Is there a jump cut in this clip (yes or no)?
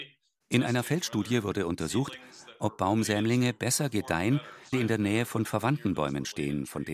yes